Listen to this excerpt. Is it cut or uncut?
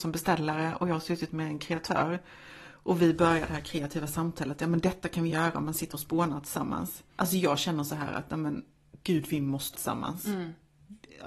cut